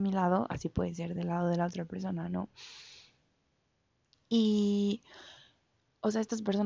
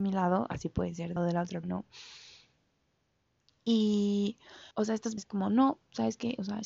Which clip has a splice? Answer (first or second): second